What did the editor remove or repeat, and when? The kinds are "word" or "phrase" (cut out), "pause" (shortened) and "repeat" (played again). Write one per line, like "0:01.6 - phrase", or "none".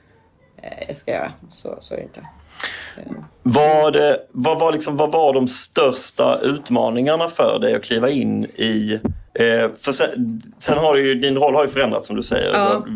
0:04.3 - pause
0:09.3 - pause